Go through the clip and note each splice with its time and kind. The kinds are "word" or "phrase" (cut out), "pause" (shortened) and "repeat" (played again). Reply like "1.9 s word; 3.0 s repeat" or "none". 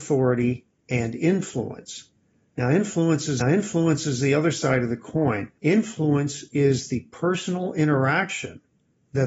3.4 s repeat; 5.6 s pause